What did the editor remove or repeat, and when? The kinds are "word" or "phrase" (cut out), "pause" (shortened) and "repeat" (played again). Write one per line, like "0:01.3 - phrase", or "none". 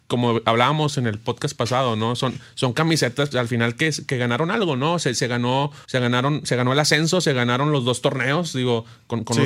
0:03.3 - word
0:05.8 - pause